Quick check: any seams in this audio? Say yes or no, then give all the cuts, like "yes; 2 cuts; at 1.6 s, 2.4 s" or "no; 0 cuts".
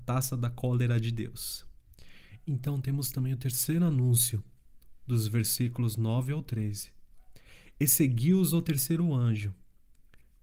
no; 0 cuts